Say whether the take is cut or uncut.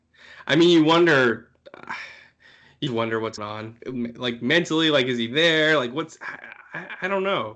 cut